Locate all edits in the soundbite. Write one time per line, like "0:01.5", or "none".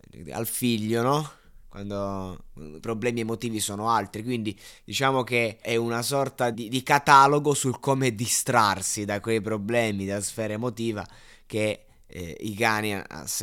0:02.8
0:04.8
0:05.6
0:06.5